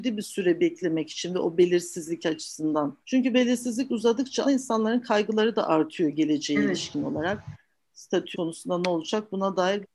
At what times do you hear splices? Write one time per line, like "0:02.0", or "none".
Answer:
0:03.0
0:04.4
0:08.3

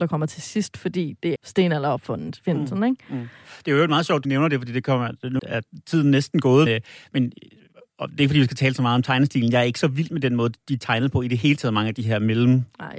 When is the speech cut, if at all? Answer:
0:01.4
0:04.2
0:05.4
0:06.7

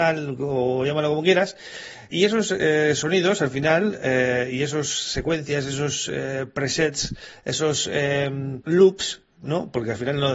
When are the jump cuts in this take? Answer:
0:02.1

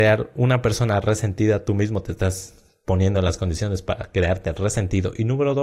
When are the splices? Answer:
none

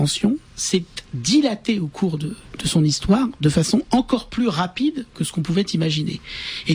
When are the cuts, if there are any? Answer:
0:01.1

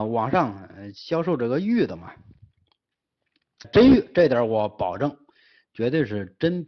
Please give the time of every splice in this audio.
0:03.6

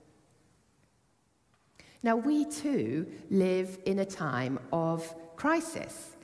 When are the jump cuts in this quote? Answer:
none

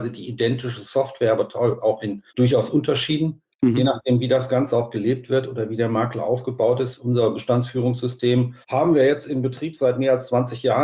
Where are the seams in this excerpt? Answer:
0:02.3
0:03.5
0:08.6

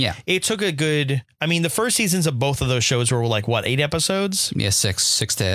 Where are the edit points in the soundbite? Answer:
none

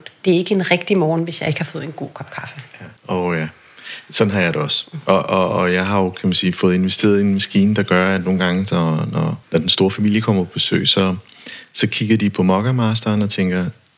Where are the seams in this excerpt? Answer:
0:03.0
0:09.4

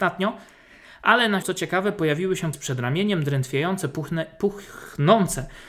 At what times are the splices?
0:01.4
0:02.5

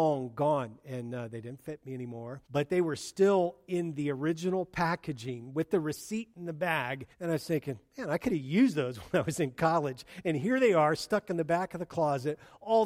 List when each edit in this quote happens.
0:02.5
0:07.1

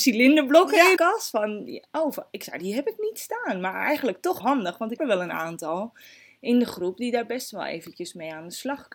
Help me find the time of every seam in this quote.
0:01.0
0:02.6
0:04.4
0:05.0

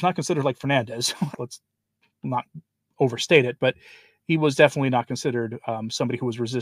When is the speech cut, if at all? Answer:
0:01.3

